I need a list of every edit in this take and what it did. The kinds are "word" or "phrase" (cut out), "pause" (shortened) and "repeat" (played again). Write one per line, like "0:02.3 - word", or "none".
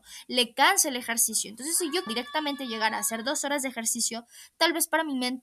0:02.1 - word

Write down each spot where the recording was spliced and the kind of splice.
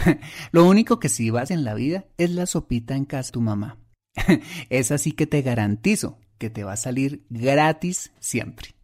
0:01.5 - phrase
0:03.3 - word

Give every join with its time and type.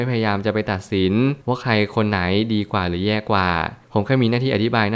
0:01.4 - pause

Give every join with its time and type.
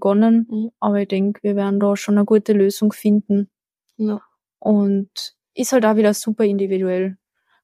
none

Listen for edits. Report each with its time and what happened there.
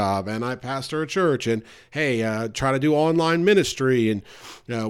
none

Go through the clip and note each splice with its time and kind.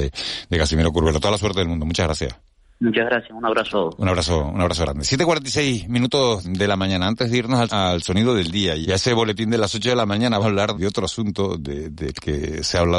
0:03.7 - word
0:06.4 - word
0:07.7 - word
0:08.8 - word
0:10.4 - word
0:10.7 - word

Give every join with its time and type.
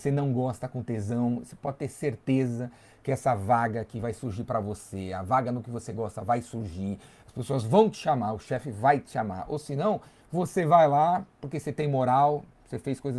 none

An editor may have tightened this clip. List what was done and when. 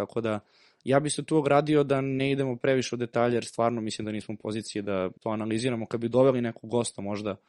0:05.2 - pause

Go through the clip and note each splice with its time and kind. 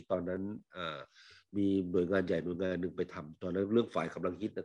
none

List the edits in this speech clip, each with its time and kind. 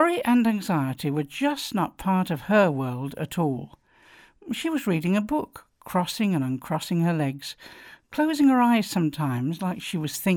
none

